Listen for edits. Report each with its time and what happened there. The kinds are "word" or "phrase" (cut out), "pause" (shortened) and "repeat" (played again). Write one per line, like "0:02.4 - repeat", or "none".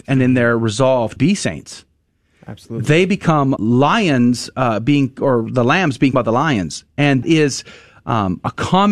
0:01.2 - word
0:03.6 - word
0:06.1 - word
0:07.2 - word

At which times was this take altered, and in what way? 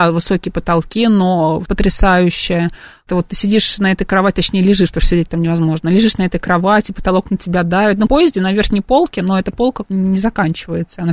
0:01.7 - word
0:03.1 - word
0:08.1 - phrase
0:09.9 - word

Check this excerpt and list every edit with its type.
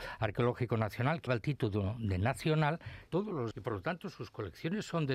0:01.3 - word
0:03.1 - phrase
0:03.5 - word

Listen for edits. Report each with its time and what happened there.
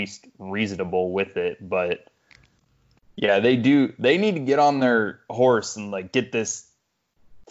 none

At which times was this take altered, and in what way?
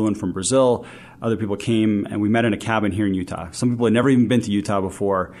none

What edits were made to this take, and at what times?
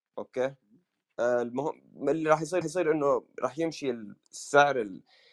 0:02.6 - repeat
0:04.2 - pause

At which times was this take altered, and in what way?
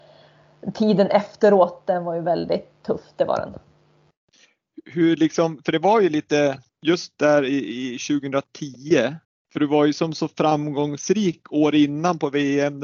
0:06.7 - pause
0:09.2 - pause

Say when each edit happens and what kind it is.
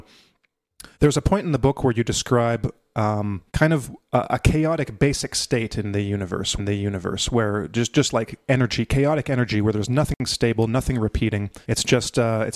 0:00.9 - pause
0:03.5 - pause
0:06.6 - repeat
0:11.6 - pause

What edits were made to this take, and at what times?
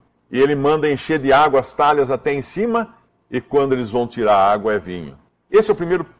none

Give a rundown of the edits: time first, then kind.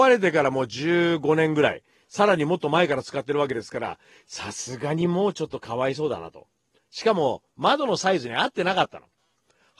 none

